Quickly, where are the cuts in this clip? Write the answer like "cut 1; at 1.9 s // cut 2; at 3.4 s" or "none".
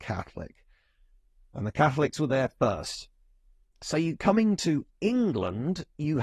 none